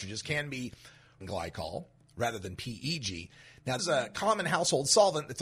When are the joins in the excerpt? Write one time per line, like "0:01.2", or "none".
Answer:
0:01.2
0:02.1
0:03.8